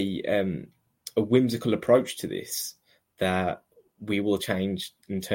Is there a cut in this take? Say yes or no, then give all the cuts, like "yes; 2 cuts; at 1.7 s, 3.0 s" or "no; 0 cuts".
no; 0 cuts